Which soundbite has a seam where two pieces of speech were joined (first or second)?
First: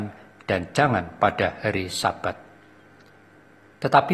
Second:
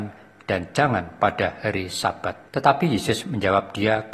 second